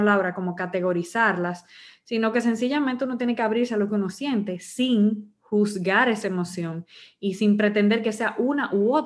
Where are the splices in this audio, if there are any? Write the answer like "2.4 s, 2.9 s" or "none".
none